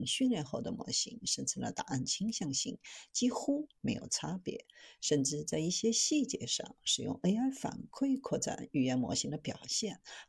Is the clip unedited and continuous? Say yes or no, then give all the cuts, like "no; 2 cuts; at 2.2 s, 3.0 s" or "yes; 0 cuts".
yes; 0 cuts